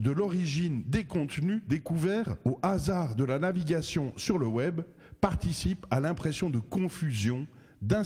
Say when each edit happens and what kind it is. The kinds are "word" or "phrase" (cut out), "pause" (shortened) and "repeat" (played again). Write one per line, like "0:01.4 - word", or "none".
none